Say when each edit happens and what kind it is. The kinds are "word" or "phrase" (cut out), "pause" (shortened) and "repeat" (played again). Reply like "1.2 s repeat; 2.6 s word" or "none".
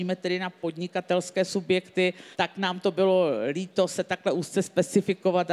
2.3 s pause

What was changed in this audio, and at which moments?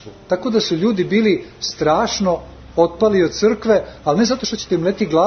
none

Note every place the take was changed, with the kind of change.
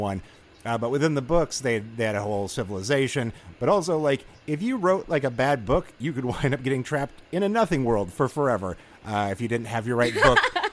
none

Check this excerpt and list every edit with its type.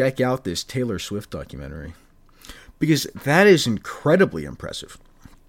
none

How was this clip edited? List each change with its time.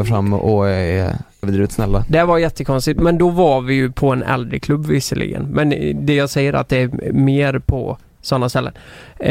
1.4 s word

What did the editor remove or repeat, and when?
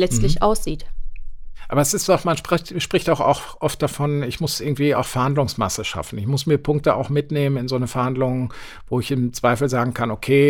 none

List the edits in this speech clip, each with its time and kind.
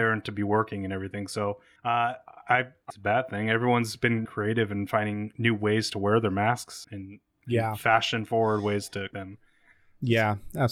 1.8 s pause; 2.9 s phrase; 4.2 s word; 6.8 s word; 9.1 s word

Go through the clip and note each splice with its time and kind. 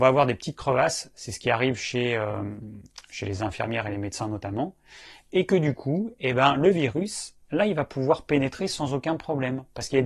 none

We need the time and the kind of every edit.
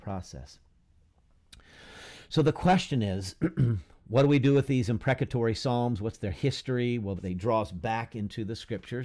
7.2 s word

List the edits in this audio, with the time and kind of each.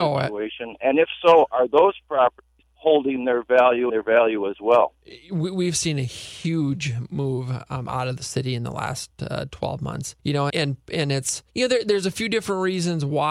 2.6 s pause; 3.9 s phrase; 10.2 s pause; 10.5 s word; 11.5 s pause

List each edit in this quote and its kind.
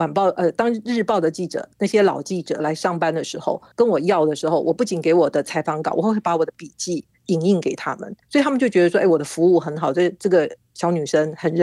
1.7 s pause; 3.7 s pause; 8.2 s pause

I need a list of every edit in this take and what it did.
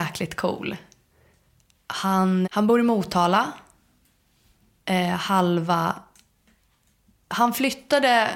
2.4 s word

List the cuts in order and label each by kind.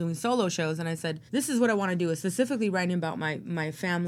1.3 s pause

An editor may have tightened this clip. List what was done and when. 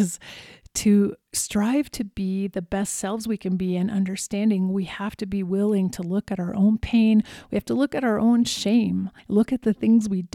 1.2 s pause; 9.2 s pause

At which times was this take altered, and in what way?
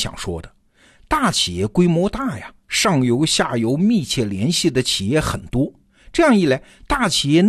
none

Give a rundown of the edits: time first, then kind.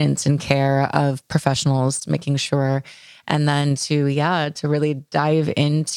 none

